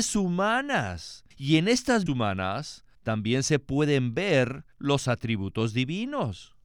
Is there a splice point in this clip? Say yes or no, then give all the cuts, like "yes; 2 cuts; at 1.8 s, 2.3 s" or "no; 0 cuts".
yes; 4 cuts; at 1.3 s, 2.1 s, 2.9 s, 4.7 s